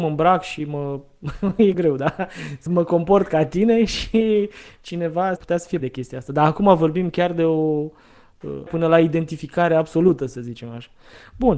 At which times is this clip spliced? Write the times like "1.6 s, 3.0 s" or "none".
1.7 s, 2.7 s, 5.4 s, 5.8 s, 8.7 s